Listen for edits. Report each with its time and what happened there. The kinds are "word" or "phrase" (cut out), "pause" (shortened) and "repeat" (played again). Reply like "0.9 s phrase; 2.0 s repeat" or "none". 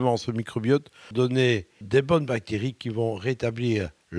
1.1 s word; 1.8 s word